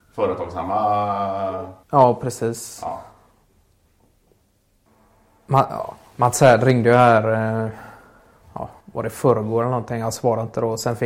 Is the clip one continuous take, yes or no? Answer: no